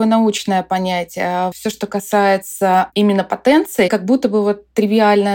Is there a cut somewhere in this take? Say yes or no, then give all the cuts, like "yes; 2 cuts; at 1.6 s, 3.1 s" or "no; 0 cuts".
yes; 2 cuts; at 1.5 s, 3.9 s